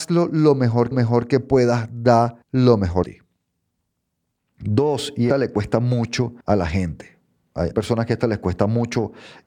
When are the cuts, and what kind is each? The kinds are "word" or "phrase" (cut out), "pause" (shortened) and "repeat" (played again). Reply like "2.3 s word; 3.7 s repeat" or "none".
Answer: 0.9 s repeat; 2.4 s pause; 3.0 s word; 5.3 s word; 6.4 s pause; 7.7 s word

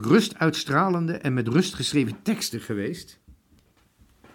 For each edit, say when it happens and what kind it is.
none

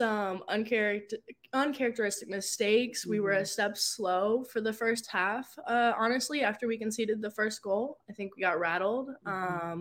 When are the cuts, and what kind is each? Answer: none

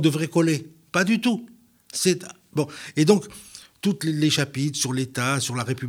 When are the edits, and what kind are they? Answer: none

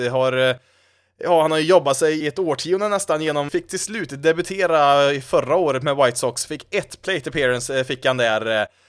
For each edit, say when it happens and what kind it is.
2.2 s word; 3.5 s phrase

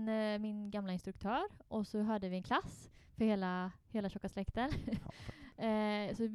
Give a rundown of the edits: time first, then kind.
none

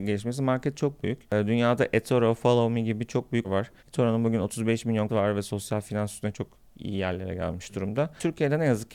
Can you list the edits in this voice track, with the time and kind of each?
3.4 s word; 3.8 s pause; 5.1 s word; 6.3 s word

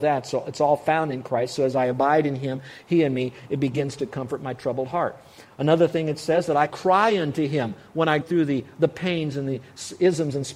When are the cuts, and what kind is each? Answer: 6.7 s word; 8.2 s word

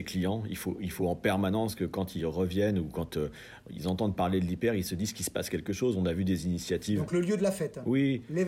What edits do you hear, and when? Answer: none

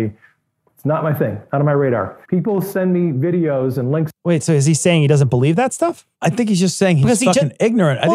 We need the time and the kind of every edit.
2.2 s pause; 4.2 s pause; 6.1 s pause

